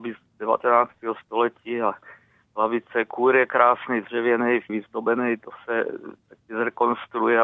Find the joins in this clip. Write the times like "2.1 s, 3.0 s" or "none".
4.7 s